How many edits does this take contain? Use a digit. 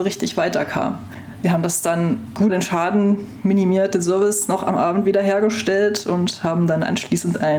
1